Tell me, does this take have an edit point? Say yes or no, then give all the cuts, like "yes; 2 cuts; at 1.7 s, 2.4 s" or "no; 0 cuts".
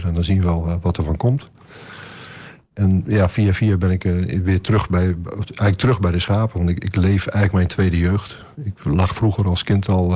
no; 0 cuts